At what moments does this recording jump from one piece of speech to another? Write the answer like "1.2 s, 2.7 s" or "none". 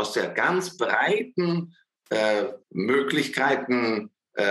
2.6 s